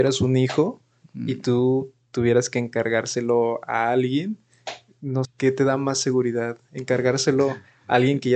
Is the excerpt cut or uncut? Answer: cut